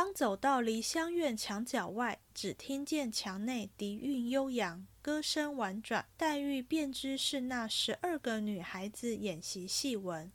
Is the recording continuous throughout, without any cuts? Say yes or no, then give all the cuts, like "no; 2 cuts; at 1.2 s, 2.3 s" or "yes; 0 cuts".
no; 1 cut; at 6.1 s